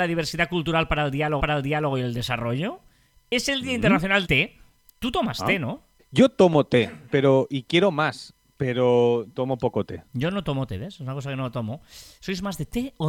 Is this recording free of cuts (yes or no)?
no